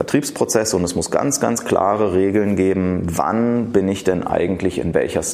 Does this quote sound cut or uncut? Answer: uncut